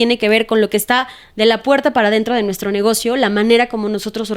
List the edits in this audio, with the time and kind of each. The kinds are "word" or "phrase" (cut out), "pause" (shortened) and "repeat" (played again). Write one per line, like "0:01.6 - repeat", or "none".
none